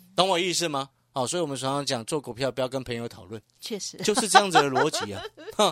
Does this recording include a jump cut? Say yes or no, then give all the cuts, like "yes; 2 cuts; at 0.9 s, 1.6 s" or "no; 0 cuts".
yes; 1 cut; at 3.6 s